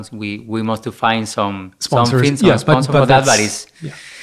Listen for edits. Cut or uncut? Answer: uncut